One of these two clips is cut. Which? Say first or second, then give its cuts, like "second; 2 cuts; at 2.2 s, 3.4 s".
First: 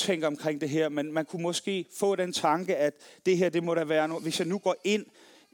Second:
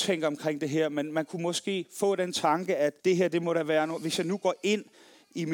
second; 1 cut; at 3.0 s